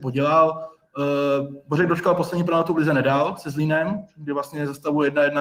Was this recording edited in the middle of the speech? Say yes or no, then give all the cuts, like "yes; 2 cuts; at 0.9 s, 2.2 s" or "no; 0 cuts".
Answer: no; 0 cuts